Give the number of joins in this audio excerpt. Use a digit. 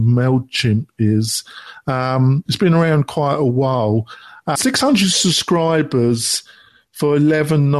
0